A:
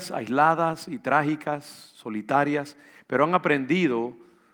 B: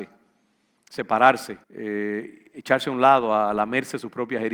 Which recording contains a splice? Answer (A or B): B